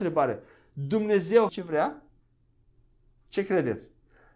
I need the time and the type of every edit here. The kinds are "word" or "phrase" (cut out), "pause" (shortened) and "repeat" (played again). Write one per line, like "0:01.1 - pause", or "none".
0:01.5 - word